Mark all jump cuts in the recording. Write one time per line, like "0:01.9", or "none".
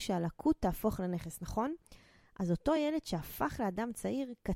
none